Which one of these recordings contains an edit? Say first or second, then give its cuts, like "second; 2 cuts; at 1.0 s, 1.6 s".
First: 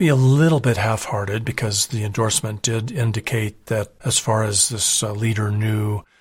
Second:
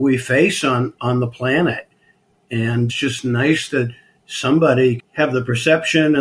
second; 2 cuts; at 2.9 s, 5.0 s